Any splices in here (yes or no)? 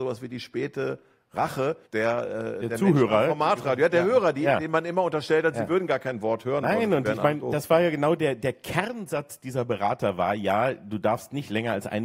yes